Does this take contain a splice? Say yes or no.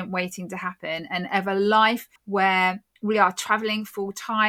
yes